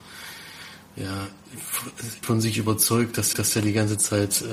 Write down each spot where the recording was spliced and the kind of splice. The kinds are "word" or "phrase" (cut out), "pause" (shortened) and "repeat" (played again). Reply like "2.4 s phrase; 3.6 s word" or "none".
2.2 s word; 3.3 s repeat